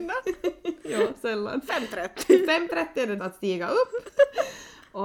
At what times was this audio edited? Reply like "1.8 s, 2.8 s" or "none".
3.2 s